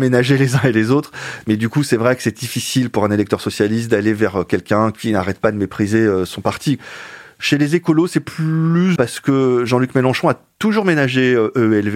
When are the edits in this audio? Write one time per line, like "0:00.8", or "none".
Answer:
0:09.0